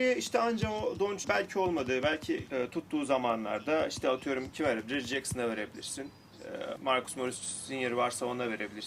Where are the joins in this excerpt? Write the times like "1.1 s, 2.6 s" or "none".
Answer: 1.2 s, 2.5 s, 6.8 s

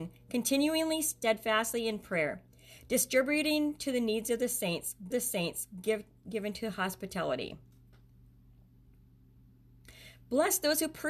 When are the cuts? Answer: 5.1 s

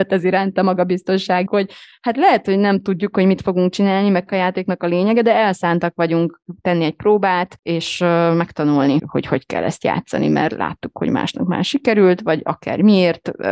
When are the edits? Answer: 1.5 s, 4.3 s, 7.6 s, 9.0 s

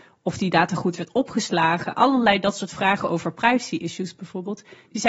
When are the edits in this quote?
none

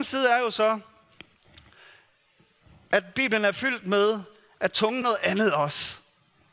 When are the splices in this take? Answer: 5.0 s

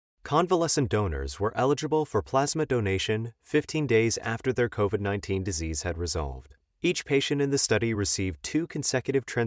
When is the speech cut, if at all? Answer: none

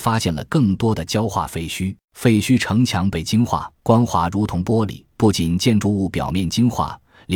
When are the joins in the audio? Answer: 2.0 s, 3.7 s, 5.1 s

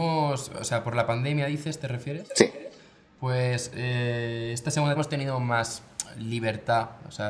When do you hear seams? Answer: 5.0 s

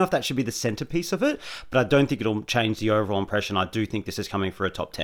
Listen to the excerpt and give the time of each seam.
none

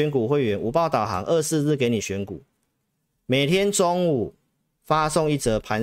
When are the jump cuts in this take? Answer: none

